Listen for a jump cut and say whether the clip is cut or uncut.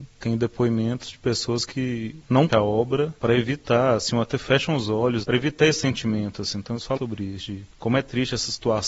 cut